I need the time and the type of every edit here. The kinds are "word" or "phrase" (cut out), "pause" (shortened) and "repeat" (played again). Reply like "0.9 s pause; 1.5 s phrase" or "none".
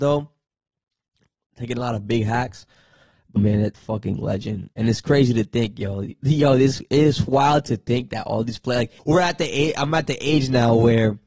3.4 s word; 3.7 s phrase; 4.7 s pause; 9.0 s pause